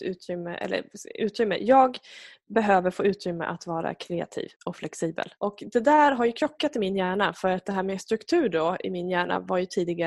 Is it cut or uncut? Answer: cut